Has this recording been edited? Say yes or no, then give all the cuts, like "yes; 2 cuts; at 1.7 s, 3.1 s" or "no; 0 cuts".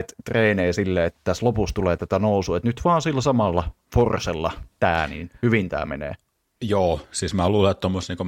no; 0 cuts